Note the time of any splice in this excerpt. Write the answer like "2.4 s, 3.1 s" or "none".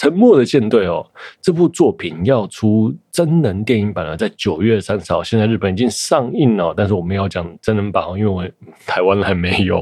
7.6 s

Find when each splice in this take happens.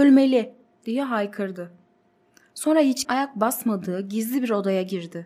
3.0 s

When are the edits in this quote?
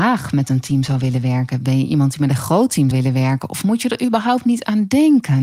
2.9 s

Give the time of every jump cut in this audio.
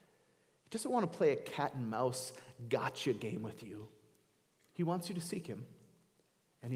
none

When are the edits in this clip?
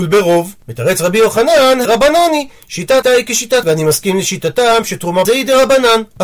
1.8 s, 3.0 s, 3.6 s, 5.2 s

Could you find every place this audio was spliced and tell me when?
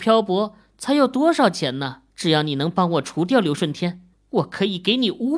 2.1 s, 4.1 s

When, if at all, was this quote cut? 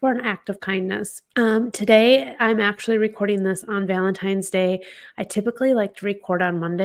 1.3 s

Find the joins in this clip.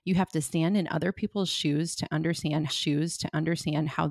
2.7 s

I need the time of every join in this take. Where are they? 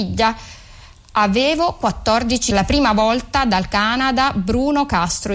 2.5 s

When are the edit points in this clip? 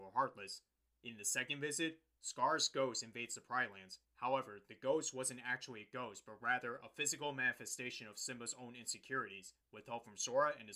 4.0 s, 9.6 s

